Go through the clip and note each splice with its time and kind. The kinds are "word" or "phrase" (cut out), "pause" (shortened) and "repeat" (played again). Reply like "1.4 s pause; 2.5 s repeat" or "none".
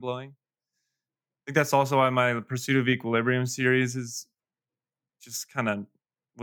none